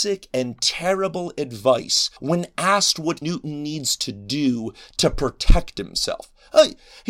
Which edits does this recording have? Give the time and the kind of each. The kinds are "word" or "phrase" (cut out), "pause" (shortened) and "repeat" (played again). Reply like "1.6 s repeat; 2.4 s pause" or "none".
2.2 s pause; 3.2 s word

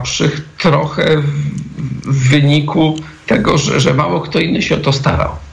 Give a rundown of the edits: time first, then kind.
none

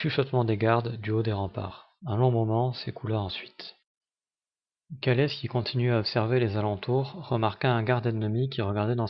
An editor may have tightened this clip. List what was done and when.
2.0 s pause

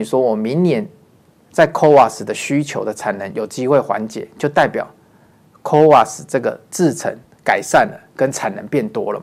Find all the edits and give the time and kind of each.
none

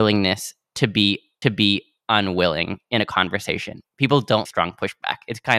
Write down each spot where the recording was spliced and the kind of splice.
1.4 s repeat; 4.5 s phrase

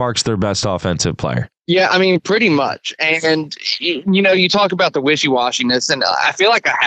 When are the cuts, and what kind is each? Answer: 1.6 s pause

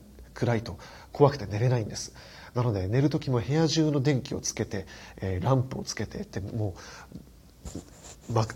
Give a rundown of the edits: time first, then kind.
none

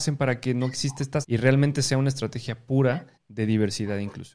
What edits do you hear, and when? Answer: 1.2 s word; 3.2 s pause

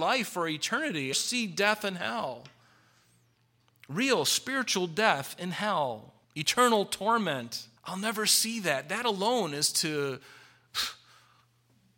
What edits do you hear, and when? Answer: 1.1 s phrase; 6.2 s pause; 7.8 s pause

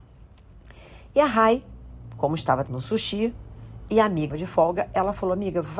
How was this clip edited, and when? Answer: 2.7 s word; 4.3 s word

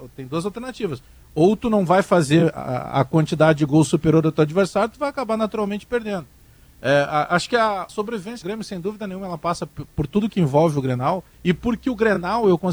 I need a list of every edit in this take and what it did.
7.9 s word; 8.4 s word; 9.7 s phrase; 11.3 s pause

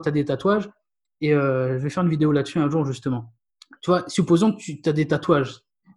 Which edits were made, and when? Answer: 3.5 s pause

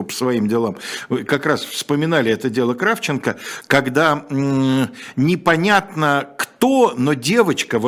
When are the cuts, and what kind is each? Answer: none

